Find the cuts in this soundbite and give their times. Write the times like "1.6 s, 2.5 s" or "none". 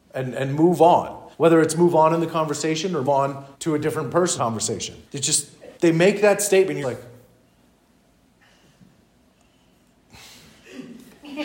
1.3 s, 3.0 s, 3.5 s, 4.4 s, 5.1 s, 5.8 s, 6.8 s